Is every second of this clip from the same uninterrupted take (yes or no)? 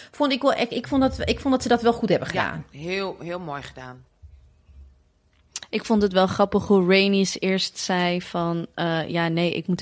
yes